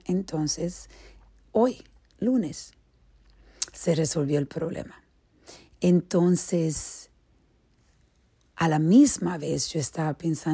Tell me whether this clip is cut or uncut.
uncut